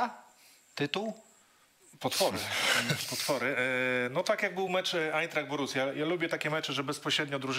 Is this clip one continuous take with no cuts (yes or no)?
yes